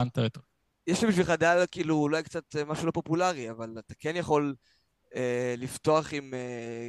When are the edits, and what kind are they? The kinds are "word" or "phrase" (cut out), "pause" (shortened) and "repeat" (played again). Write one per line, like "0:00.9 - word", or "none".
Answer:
none